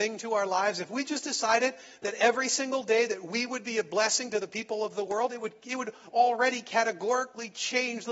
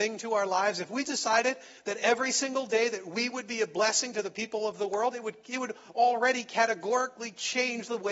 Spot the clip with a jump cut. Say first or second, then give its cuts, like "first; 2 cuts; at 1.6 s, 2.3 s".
second; 1 cut; at 1.0 s